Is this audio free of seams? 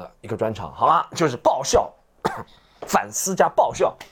yes; 0 cuts

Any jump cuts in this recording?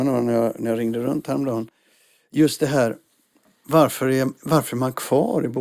no; 0 cuts

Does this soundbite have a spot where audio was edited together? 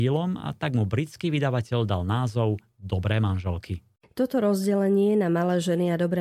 no; 0 cuts

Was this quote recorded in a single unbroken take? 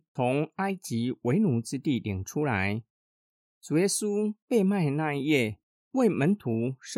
yes; 0 cuts

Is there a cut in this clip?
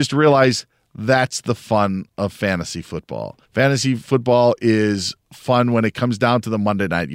yes; 1 cut; at 3.4 s

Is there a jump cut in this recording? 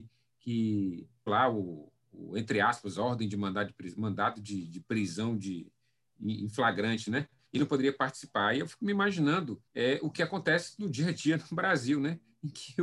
yes; 2 cuts; at 1.3 s, 9.7 s

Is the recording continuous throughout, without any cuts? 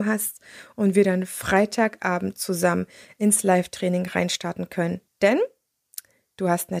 yes; 0 cuts

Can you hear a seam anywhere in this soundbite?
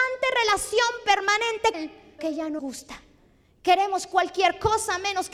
yes; 3 cuts; at 1.7 s, 2.2 s, 2.6 s

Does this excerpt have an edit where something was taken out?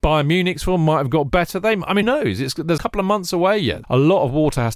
yes; 3 cuts; at 2.0 s, 2.8 s, 3.8 s

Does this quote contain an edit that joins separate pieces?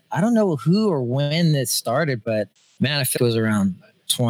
yes; 2 cuts; at 2.2 s, 3.2 s

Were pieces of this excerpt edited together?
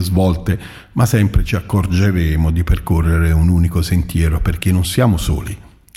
no; 0 cuts

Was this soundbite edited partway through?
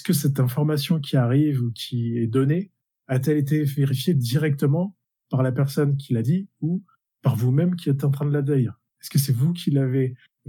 no; 0 cuts

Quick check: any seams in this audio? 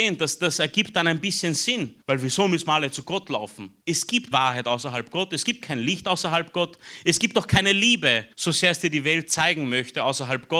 yes; 4 cuts; at 2.0 s, 3.8 s, 4.3 s, 8.3 s

